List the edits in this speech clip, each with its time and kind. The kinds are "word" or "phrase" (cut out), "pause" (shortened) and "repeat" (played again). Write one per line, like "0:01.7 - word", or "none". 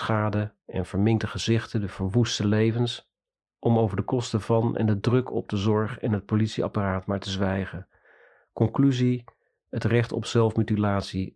none